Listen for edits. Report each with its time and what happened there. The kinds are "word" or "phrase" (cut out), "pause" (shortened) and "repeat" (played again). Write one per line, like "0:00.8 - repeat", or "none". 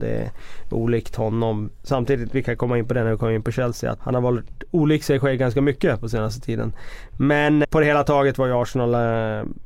0:04.0 - word
0:07.6 - word